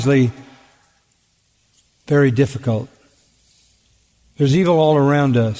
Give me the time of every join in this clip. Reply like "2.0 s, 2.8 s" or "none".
none